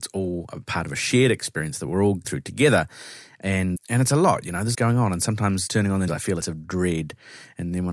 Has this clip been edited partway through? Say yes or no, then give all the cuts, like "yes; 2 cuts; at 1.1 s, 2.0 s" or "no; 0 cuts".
yes; 6 cuts; at 2.2 s, 3.8 s, 4.7 s, 5.7 s, 6.1 s, 6.4 s